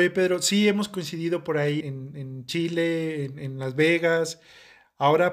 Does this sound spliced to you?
yes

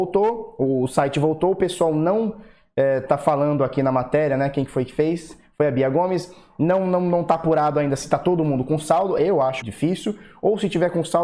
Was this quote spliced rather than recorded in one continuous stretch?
yes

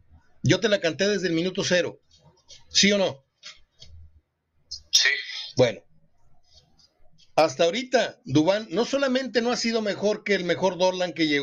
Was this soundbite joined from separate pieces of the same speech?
no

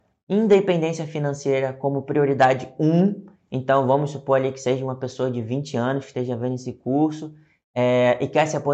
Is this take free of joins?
yes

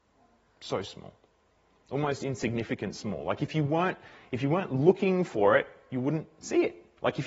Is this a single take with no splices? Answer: yes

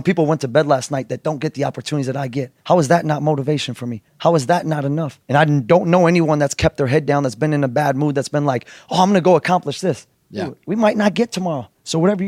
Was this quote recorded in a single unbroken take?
no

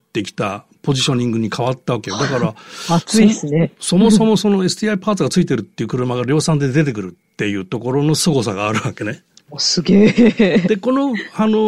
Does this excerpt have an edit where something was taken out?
no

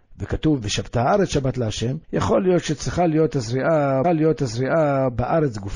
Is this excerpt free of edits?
no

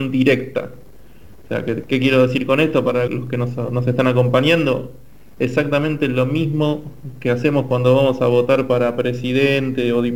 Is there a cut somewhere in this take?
yes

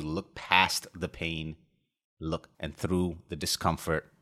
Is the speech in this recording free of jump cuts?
no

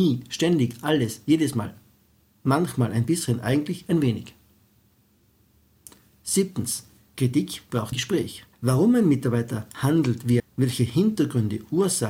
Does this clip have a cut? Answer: yes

